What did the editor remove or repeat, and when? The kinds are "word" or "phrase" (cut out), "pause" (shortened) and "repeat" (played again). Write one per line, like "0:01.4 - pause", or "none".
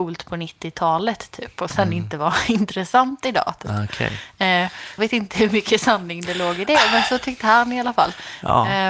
0:05.0 - word